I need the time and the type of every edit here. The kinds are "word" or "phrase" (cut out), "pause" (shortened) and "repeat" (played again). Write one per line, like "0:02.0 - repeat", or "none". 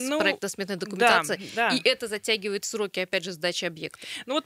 none